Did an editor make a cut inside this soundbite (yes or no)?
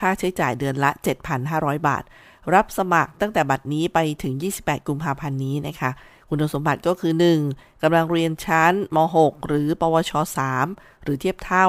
no